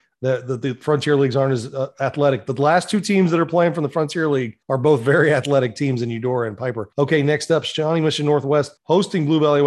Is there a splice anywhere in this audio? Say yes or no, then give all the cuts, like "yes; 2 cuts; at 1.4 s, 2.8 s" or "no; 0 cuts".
yes; 3 cuts; at 4.6 s, 6.9 s, 8.8 s